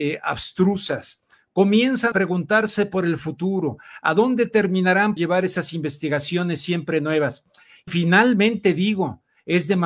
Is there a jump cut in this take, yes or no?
yes